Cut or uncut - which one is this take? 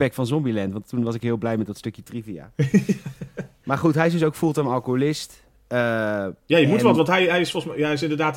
uncut